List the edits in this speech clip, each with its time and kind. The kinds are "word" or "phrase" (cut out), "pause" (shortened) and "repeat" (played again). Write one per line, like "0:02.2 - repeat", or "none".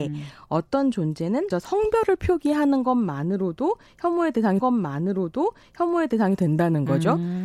0:01.5 - word
0:04.6 - repeat